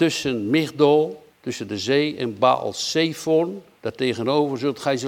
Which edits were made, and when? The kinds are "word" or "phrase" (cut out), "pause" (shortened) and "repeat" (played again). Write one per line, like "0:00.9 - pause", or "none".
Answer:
0:01.3 - pause
0:03.7 - pause